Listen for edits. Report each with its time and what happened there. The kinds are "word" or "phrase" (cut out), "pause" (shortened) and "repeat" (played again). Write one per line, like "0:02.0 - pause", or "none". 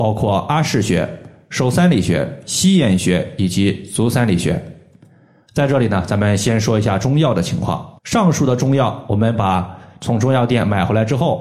0:08.0 - pause